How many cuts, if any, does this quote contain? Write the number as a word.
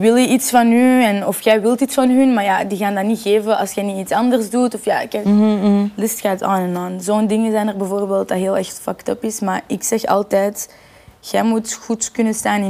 zero